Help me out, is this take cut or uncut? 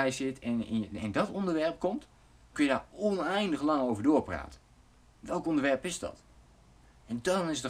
cut